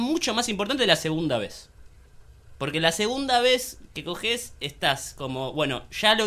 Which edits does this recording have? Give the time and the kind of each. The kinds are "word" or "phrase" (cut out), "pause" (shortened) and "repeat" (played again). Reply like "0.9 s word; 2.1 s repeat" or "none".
none